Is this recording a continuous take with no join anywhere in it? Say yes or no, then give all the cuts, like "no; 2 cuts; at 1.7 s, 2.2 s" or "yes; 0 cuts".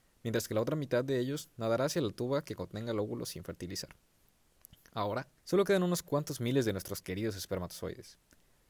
no; 1 cut; at 5.4 s